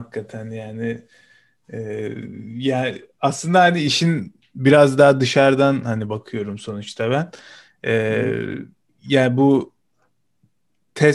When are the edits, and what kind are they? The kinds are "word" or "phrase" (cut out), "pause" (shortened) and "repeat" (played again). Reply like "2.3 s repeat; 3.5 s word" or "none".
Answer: none

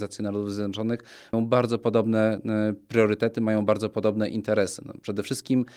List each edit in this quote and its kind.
1.3 s word

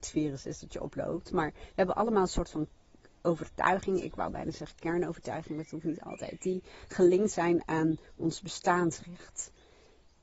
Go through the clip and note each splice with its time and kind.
none

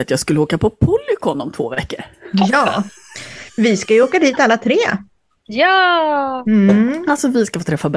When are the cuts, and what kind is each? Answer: none

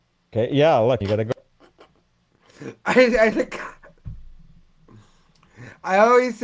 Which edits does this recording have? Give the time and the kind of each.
1.0 s word; 3.3 s word

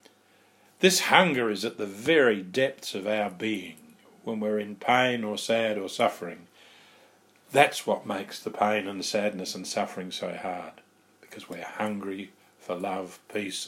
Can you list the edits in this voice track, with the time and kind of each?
none

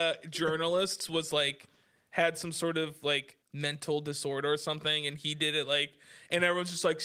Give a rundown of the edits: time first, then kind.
3.4 s pause

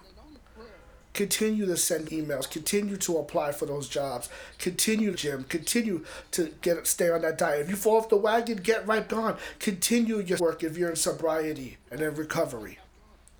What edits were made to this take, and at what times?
2.1 s word; 5.1 s phrase; 9.1 s word; 10.4 s word; 11.9 s pause

